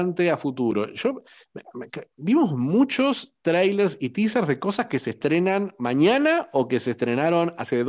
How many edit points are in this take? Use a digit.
0